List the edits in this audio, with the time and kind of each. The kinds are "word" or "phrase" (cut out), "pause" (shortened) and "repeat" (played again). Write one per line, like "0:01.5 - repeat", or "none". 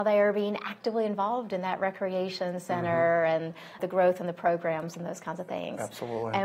0:03.8 - word